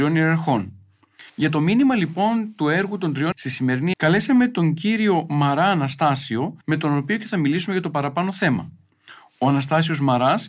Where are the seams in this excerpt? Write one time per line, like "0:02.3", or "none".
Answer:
0:01.3
0:03.3
0:03.9
0:06.6